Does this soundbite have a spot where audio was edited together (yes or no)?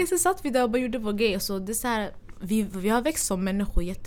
no